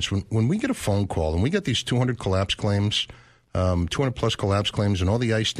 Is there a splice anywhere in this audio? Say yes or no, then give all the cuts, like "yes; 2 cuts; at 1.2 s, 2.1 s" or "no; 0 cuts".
no; 0 cuts